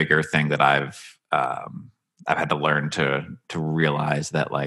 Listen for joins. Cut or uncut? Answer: uncut